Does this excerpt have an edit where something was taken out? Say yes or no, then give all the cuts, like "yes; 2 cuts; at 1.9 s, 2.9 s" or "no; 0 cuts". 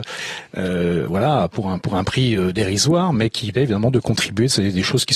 yes; 1 cut; at 3.5 s